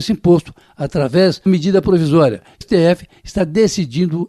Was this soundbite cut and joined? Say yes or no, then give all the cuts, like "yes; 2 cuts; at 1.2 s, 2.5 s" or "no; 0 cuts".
yes; 2 cuts; at 1.5 s, 2.6 s